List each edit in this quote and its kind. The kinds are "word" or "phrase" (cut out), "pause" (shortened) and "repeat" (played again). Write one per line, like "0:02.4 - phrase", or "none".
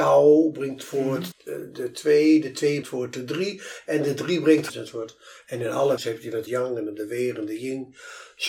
0:01.3 - word
0:02.8 - word
0:04.7 - phrase
0:06.0 - word
0:06.5 - word